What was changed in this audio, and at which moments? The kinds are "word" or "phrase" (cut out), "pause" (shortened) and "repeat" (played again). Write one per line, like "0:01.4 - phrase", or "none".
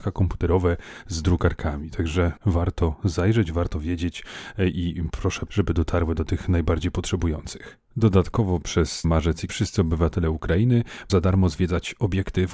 0:02.4 - phrase
0:05.5 - phrase
0:07.8 - pause
0:09.0 - word
0:09.5 - word
0:11.1 - word